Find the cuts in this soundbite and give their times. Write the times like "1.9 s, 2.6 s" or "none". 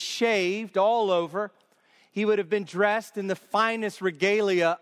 none